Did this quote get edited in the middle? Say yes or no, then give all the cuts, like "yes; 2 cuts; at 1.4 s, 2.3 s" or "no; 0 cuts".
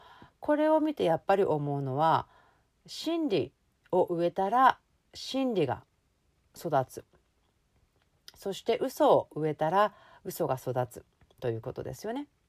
no; 0 cuts